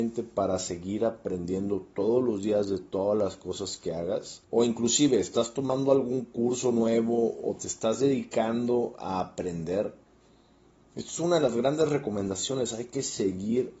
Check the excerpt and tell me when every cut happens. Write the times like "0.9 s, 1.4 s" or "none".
4.4 s